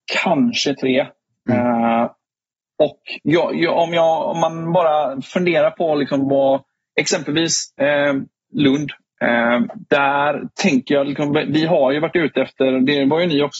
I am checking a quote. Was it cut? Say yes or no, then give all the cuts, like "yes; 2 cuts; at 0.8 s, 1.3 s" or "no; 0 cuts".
no; 0 cuts